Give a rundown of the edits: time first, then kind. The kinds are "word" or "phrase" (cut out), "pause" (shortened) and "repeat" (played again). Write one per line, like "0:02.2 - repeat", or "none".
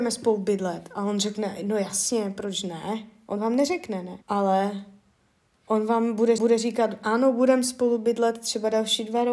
0:04.2 - pause
0:06.4 - repeat